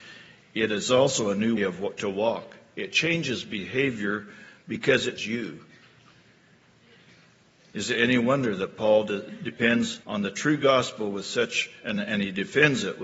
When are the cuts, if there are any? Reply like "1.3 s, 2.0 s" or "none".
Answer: 1.6 s, 5.2 s, 10.0 s